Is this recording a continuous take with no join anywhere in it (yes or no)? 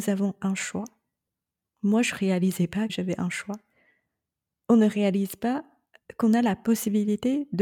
no